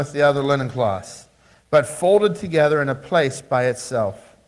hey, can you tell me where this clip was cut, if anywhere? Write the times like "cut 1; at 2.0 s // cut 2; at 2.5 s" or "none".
none